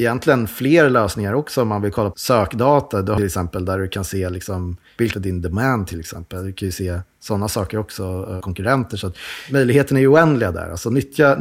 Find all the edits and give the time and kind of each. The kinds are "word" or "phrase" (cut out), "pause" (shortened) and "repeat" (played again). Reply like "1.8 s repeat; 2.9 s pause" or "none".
2.1 s word; 3.2 s phrase; 5.1 s phrase; 8.4 s phrase